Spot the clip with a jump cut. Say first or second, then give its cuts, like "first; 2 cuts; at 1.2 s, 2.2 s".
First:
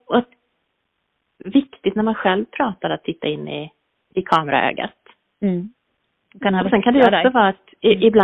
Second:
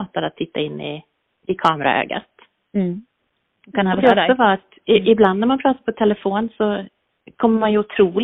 second; 1 cut; at 4.0 s